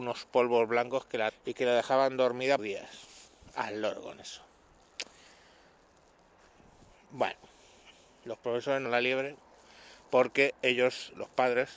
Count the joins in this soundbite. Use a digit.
3